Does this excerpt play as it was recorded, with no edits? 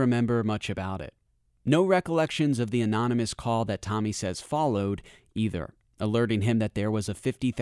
yes; 0 cuts

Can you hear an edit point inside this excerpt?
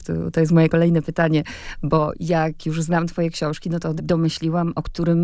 yes; 1 cut; at 4.0 s

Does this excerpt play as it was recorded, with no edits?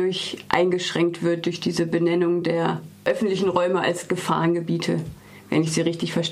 yes; 0 cuts

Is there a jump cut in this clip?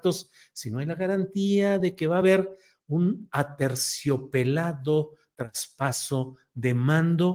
no; 0 cuts

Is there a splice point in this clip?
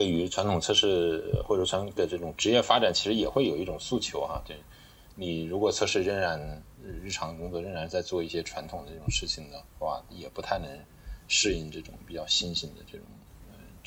yes; 2 cuts; at 2.0 s, 9.7 s

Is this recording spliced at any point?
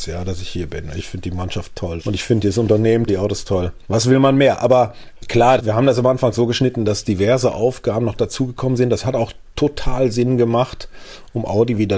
yes; 1 cut; at 3.1 s

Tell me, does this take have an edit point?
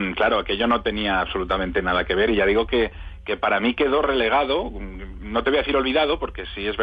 no; 0 cuts

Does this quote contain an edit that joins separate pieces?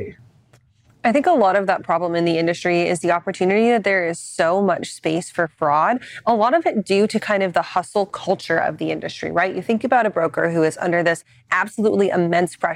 no; 0 cuts

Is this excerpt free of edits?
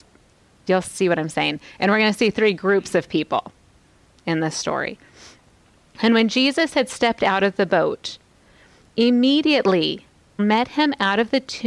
no; 1 cut; at 10.4 s

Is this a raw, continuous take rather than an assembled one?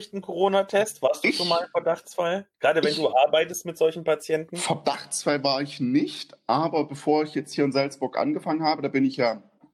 no; 1 cut; at 2.5 s

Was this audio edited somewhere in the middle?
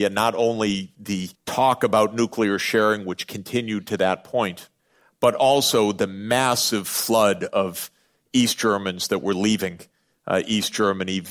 yes; 2 cuts; at 1.3 s, 4.8 s

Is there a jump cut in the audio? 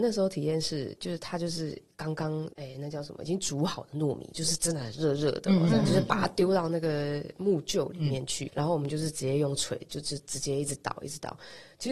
yes; 2 cuts; at 2.5 s, 8.5 s

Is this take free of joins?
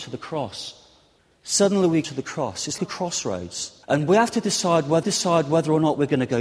no; 5 cuts; at 1.2 s, 2.0 s, 2.8 s, 3.8 s, 5.0 s

